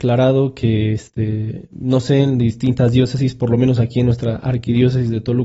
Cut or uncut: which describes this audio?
uncut